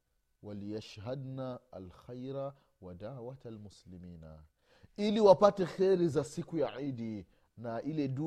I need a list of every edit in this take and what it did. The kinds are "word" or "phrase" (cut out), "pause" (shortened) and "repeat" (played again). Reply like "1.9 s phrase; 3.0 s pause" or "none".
none

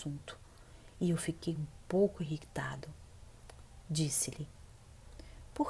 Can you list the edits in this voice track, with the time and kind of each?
none

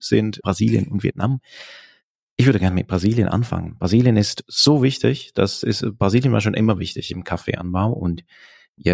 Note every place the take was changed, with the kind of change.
none

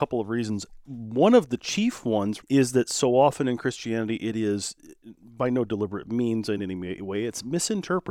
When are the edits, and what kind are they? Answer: 2.4 s word; 6.6 s word

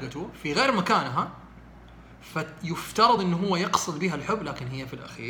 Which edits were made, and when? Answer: none

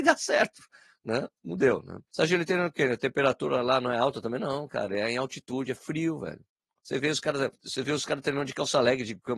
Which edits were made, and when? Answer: 2.1 s pause; 7.5 s pause

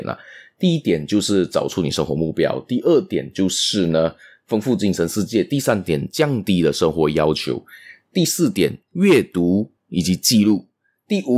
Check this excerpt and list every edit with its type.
8.8 s pause; 9.8 s pause

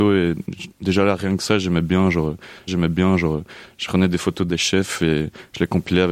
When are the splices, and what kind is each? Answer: 2.7 s repeat; 4.5 s phrase

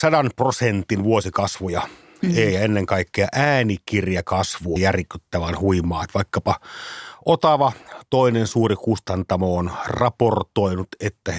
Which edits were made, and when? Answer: 4.8 s phrase

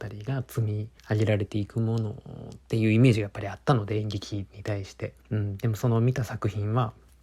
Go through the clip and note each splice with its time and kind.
1.0 s pause; 2.6 s pause; 5.2 s pause

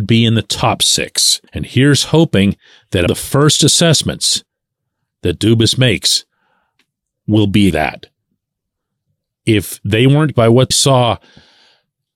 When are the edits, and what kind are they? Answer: 1.5 s pause; 3.1 s word; 7.7 s word; 10.3 s word; 10.7 s word

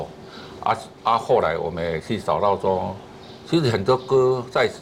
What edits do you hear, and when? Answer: 1.0 s pause

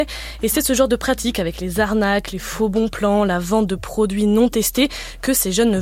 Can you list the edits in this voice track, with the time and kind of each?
none

